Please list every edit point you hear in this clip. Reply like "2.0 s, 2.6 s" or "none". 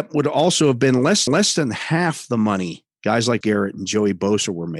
1.3 s, 2.9 s, 3.4 s